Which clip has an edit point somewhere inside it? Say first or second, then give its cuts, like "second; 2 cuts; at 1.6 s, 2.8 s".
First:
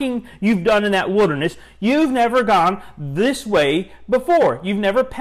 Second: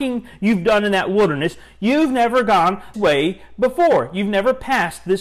second; 1 cut; at 2.9 s